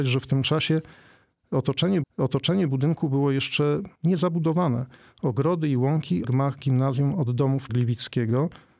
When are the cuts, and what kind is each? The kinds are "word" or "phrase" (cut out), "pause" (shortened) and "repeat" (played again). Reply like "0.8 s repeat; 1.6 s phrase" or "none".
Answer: 2.0 s repeat; 3.9 s pause; 6.2 s word; 7.7 s word